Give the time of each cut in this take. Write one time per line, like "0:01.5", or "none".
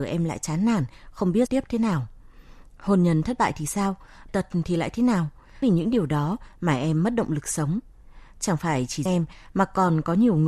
0:01.5
0:04.3
0:05.6
0:09.1